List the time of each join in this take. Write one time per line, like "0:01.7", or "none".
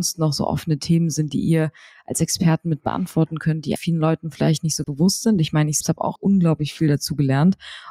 0:03.8
0:04.8
0:05.8
0:06.2